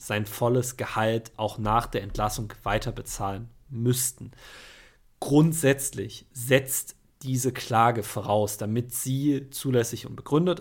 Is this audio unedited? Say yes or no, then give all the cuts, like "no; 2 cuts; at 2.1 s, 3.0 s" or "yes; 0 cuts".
yes; 0 cuts